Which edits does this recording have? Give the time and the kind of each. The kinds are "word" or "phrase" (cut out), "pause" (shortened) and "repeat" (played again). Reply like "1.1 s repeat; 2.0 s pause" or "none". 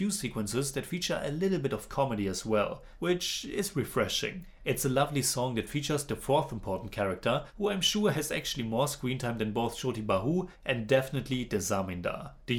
none

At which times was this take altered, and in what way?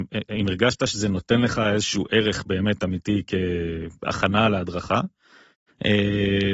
none

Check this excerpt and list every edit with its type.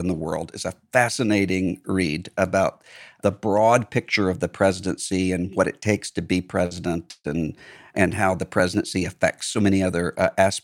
none

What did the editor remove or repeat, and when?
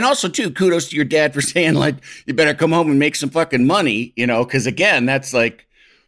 none

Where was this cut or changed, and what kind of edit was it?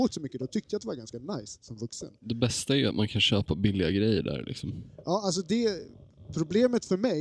none

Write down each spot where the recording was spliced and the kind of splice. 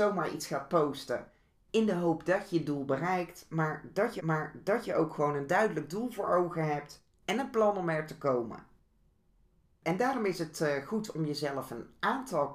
4.2 s repeat

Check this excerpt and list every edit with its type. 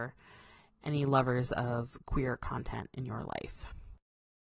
none

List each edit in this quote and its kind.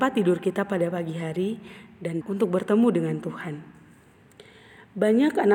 2.2 s word

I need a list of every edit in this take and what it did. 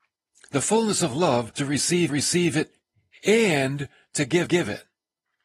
1.6 s word; 2.1 s repeat; 4.5 s repeat

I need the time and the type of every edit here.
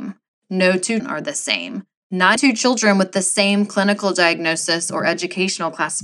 1.0 s word; 2.4 s word

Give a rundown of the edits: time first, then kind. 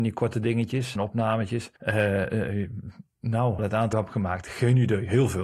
1.0 s word; 1.8 s pause; 3.6 s word; 3.9 s phrase

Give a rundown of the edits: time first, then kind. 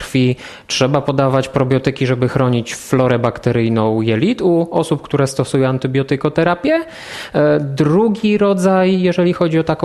none

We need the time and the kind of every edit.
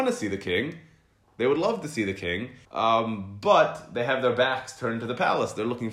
2.6 s pause

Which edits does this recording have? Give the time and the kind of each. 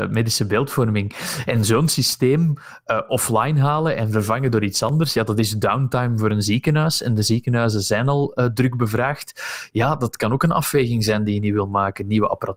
none

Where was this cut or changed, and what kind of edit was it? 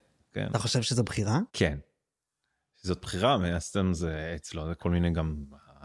1.5 s pause

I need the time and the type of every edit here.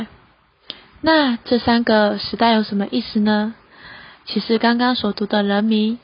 none

